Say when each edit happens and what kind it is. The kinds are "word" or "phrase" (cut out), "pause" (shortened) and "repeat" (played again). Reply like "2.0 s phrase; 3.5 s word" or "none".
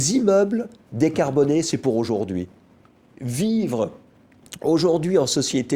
none